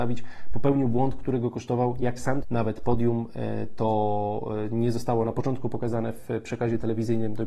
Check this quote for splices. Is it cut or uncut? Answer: cut